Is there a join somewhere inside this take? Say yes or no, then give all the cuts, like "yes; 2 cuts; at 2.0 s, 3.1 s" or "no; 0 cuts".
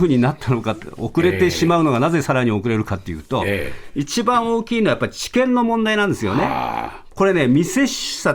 no; 0 cuts